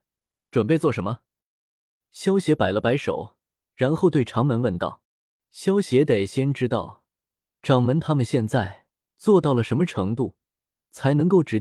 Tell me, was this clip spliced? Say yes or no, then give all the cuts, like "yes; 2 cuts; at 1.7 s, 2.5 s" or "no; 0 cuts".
yes; 1 cut; at 5.0 s